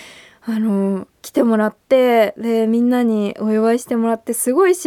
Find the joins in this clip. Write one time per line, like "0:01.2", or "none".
0:01.2